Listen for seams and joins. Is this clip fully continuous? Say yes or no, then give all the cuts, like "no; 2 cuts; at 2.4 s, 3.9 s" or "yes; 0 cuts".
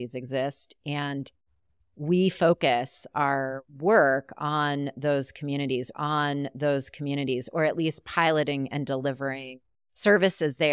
no; 3 cuts; at 3.7 s, 5.9 s, 9.7 s